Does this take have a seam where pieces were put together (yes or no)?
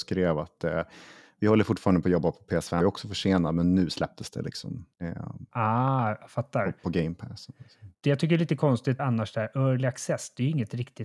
yes